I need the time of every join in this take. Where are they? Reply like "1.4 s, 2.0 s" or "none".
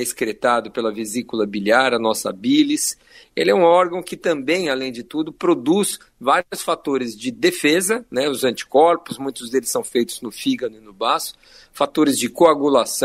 none